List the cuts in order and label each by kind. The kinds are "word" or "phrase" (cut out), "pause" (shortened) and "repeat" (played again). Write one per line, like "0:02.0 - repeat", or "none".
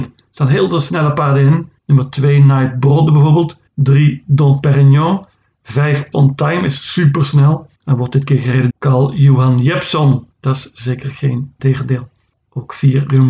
0:01.8 - pause
0:03.7 - pause
0:06.1 - word
0:07.8 - pause
0:08.7 - word
0:10.3 - pause
0:11.6 - phrase